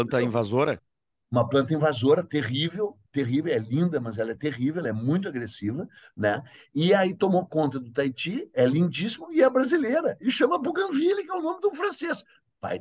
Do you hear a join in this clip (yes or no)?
no